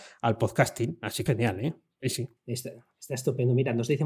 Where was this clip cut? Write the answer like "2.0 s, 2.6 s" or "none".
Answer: 1.3 s, 2.4 s